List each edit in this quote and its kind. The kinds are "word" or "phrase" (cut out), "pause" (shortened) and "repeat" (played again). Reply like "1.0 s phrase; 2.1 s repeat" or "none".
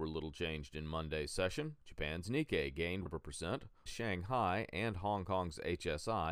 1.8 s pause; 3.1 s phrase; 3.9 s phrase